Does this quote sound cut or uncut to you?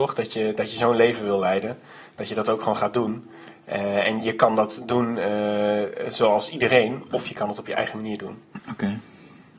uncut